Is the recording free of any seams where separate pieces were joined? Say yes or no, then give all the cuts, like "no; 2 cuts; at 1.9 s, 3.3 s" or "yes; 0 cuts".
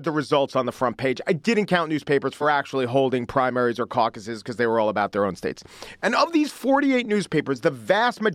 no; 1 cut; at 2.4 s